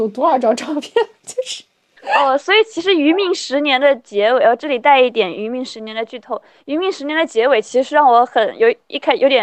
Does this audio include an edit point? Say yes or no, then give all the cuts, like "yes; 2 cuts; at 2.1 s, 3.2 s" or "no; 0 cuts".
no; 0 cuts